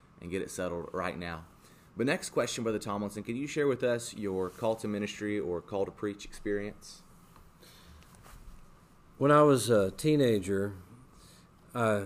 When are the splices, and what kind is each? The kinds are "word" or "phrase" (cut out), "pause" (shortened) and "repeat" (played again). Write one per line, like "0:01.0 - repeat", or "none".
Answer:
none